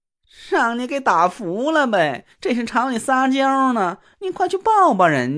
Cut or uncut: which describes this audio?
cut